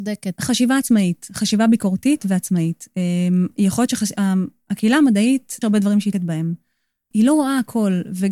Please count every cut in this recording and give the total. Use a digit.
3